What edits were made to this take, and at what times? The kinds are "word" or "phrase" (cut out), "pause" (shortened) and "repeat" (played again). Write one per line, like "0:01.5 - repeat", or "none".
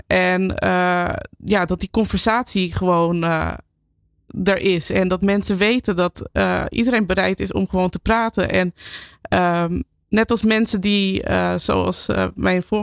none

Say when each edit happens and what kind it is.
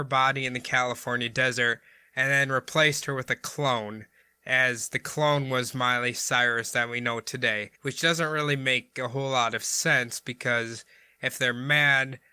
0:07.7 - pause

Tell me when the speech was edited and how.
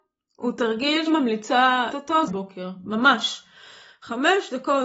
0:01.1 - word
0:01.9 - word
0:02.3 - phrase

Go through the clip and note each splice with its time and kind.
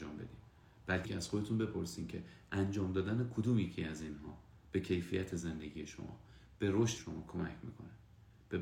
0:01.0 - word
0:07.0 - word

